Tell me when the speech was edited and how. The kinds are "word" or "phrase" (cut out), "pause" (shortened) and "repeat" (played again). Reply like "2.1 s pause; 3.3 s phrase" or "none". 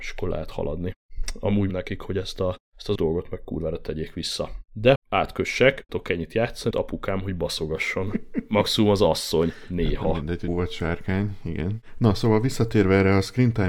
1.7 s word; 2.6 s pause; 3.0 s word; 5.0 s word; 5.9 s word; 6.7 s phrase; 10.5 s word